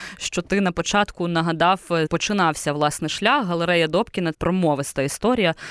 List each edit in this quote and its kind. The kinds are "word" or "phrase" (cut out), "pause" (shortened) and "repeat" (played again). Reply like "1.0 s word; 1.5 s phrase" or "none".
2.1 s word; 4.3 s phrase